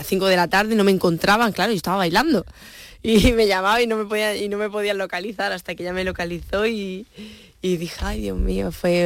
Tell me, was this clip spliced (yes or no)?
no